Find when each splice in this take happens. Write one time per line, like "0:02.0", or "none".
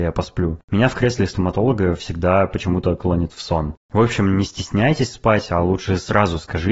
none